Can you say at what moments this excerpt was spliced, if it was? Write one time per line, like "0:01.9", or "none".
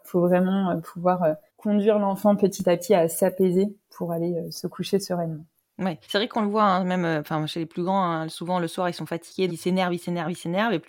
0:01.5
0:06.0
0:09.5